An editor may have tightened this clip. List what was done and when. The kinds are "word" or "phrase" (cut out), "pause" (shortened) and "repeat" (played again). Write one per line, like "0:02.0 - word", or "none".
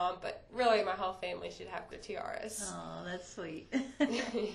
0:01.9 - word